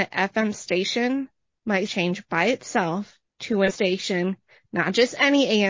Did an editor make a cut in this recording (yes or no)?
yes